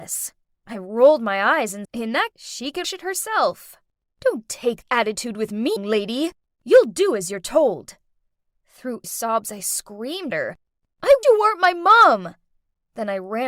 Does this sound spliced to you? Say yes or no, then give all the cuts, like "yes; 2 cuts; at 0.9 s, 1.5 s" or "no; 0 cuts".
yes; 8 cuts; at 1.8 s, 2.3 s, 2.8 s, 4.8 s, 5.8 s, 9.0 s, 10.3 s, 11.2 s